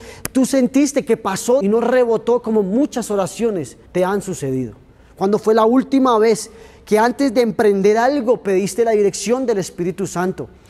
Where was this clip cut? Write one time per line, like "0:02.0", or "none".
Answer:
0:01.6
0:03.9

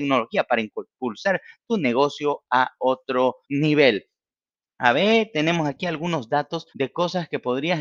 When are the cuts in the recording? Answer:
0:03.4
0:06.7

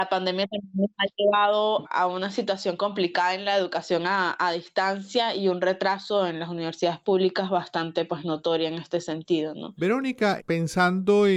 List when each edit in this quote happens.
0:01.8
0:10.4

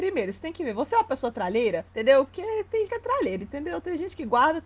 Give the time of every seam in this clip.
0:01.9
0:02.9

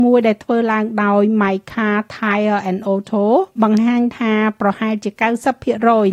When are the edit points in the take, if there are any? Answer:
none

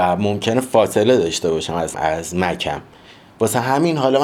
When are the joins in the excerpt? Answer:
0:01.9

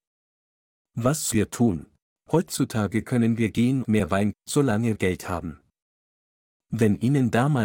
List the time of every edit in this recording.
0:01.3
0:02.0
0:03.8
0:04.3
0:05.0

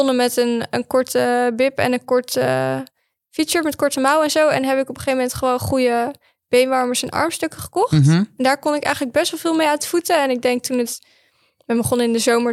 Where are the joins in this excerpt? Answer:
none

